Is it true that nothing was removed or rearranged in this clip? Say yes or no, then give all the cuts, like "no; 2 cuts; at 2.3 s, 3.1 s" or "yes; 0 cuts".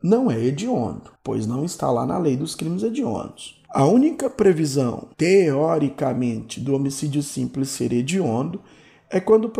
no; 3 cuts; at 1.2 s, 3.7 s, 5.1 s